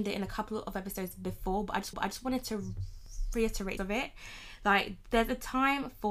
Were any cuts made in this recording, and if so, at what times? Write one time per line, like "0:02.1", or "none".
0:01.9
0:03.8